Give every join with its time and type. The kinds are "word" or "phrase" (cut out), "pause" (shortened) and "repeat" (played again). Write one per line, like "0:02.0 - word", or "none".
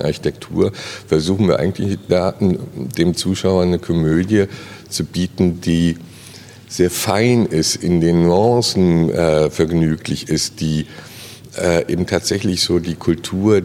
none